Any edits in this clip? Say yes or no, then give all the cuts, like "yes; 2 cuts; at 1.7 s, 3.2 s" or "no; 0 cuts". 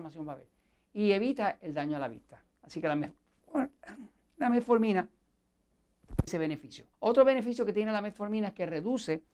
yes; 2 cuts; at 6.3 s, 6.9 s